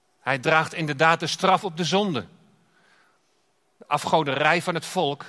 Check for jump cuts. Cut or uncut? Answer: uncut